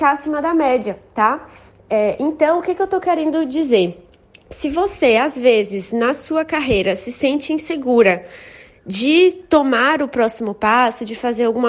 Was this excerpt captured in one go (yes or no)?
yes